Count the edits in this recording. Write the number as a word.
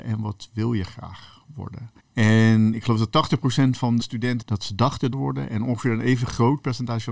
four